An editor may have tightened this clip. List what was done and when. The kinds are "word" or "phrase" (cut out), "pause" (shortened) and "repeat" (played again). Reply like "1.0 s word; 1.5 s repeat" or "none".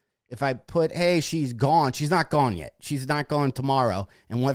3.5 s word